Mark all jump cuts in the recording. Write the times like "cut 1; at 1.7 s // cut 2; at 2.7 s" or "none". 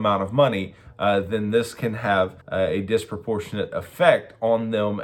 cut 1; at 2.4 s